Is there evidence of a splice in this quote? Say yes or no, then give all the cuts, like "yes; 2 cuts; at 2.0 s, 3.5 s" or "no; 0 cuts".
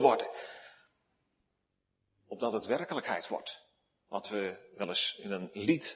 no; 0 cuts